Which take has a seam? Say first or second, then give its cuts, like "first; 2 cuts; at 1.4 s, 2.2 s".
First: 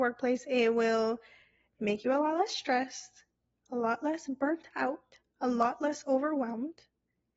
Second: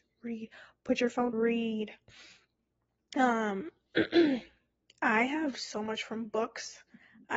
second; 2 cuts; at 1.3 s, 5.5 s